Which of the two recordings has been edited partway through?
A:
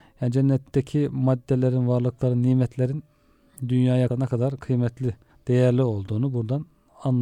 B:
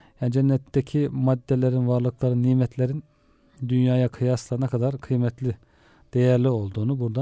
A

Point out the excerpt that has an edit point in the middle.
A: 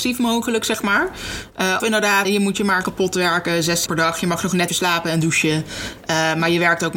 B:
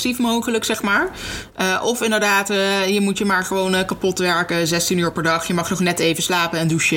A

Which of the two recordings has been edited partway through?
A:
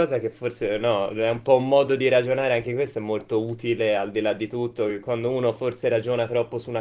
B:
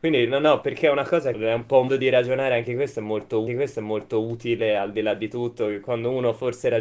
B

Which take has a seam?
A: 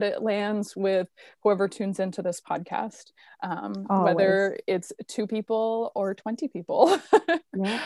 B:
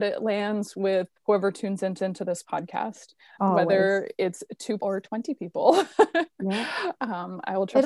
B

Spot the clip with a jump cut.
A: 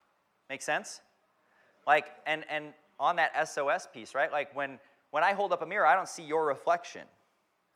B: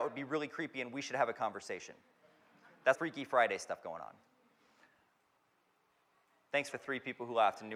B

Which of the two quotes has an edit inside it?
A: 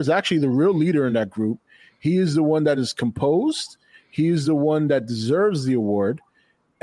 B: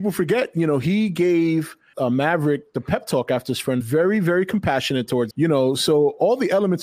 B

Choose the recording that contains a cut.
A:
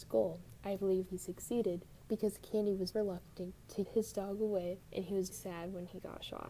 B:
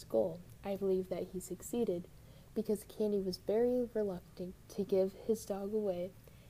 A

